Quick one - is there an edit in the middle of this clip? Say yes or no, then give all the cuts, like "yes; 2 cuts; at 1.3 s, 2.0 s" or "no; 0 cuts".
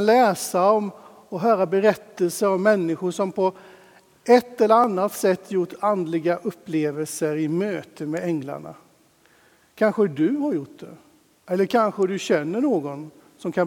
no; 0 cuts